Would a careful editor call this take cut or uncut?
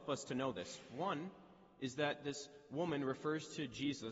uncut